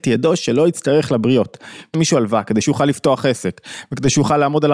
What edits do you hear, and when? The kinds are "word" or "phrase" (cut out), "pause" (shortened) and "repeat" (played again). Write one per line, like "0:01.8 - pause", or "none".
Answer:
0:01.9 - word
0:02.6 - phrase